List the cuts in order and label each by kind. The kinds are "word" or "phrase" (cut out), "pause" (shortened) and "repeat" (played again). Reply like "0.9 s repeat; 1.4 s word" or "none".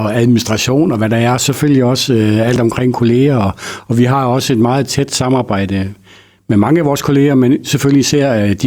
none